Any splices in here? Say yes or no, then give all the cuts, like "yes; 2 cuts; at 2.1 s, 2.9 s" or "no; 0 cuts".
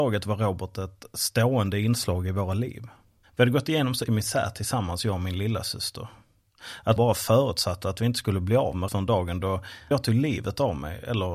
yes; 4 cuts; at 4.1 s, 7.0 s, 8.9 s, 9.9 s